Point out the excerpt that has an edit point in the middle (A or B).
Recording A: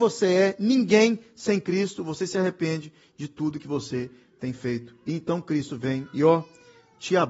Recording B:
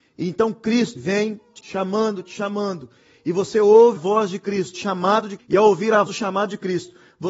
B